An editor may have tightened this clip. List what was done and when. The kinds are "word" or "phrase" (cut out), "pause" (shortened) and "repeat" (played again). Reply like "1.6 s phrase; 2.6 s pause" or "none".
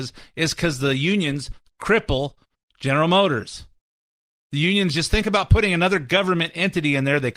none